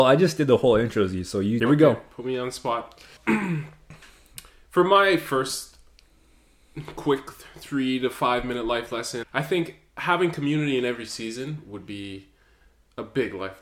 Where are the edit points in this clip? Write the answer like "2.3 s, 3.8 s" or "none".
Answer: 1.6 s, 3.2 s, 9.2 s